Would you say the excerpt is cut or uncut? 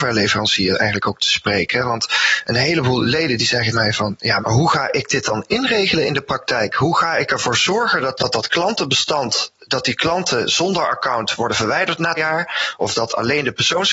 cut